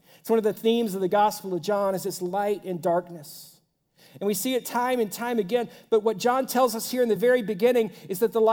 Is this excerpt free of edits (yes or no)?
yes